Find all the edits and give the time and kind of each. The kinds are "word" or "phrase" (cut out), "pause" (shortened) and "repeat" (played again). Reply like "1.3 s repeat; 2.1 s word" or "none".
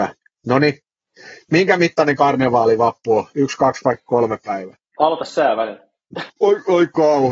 4.0 s pause; 4.9 s pause; 6.3 s pause